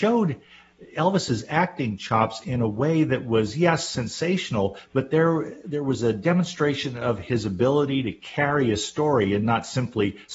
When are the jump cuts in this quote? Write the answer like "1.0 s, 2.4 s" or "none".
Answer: none